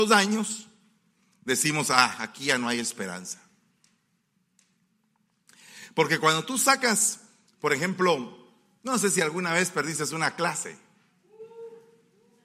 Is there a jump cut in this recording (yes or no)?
no